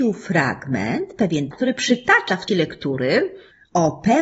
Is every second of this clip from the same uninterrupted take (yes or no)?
no